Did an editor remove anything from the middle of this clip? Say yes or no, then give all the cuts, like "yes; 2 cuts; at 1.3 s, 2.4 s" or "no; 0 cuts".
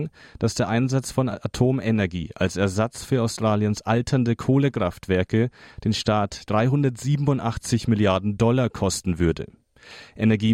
no; 0 cuts